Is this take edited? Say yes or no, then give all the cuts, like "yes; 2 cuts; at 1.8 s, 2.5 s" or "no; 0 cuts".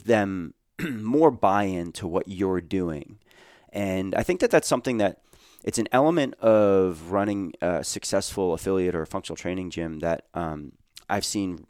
no; 0 cuts